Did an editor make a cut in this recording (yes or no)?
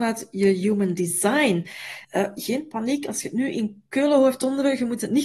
yes